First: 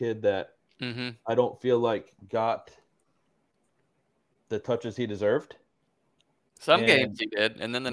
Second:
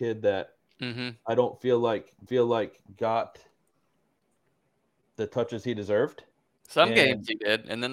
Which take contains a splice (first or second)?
second